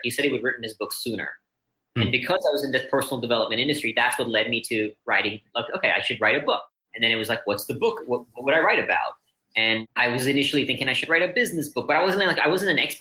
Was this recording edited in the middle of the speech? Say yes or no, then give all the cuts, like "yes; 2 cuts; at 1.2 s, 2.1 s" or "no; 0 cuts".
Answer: no; 0 cuts